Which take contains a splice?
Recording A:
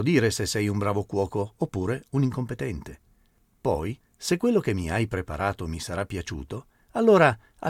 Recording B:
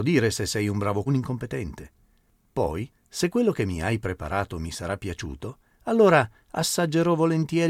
B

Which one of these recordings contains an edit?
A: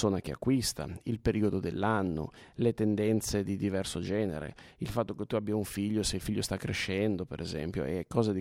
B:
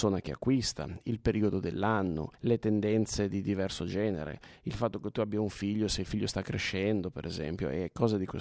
B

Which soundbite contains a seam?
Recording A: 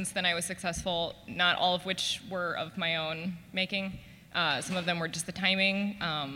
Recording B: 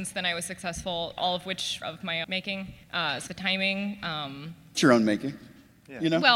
B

